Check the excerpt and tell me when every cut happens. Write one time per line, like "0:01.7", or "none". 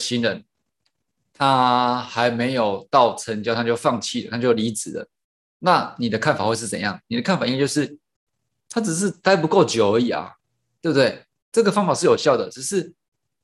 0:11.3